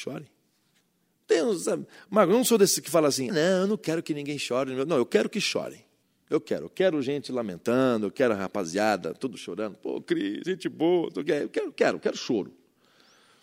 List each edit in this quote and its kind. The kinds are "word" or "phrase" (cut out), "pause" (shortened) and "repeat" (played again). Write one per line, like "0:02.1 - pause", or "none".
0:03.3 - word
0:06.0 - pause